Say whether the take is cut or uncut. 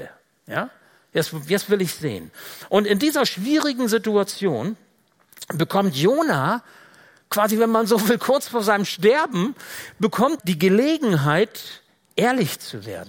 cut